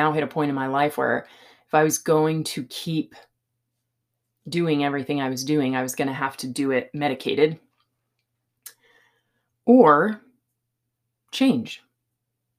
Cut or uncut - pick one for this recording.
uncut